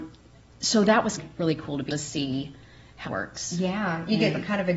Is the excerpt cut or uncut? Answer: cut